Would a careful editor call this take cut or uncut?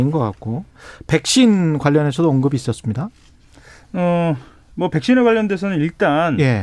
uncut